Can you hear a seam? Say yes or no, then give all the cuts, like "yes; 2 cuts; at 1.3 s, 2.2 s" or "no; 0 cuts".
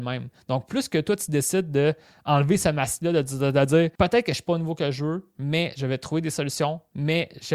yes; 1 cut; at 3.9 s